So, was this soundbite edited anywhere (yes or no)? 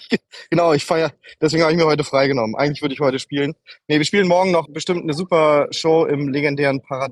yes